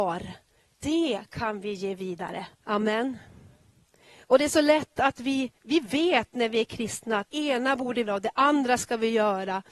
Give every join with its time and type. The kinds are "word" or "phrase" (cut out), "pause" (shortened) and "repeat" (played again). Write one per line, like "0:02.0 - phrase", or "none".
0:02.5 - pause
0:05.6 - pause
0:07.3 - word
0:08.1 - word